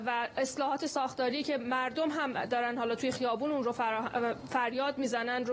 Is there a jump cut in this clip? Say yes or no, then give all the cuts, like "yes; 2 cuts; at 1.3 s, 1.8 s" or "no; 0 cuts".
no; 0 cuts